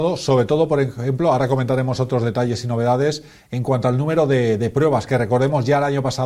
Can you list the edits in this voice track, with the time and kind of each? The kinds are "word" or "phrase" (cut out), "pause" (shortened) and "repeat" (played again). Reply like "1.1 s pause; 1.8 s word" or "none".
none